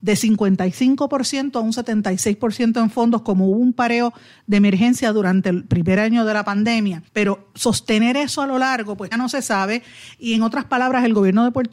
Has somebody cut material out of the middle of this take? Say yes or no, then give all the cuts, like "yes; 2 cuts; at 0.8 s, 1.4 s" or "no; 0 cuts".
yes; 2 cuts; at 7.1 s, 9.1 s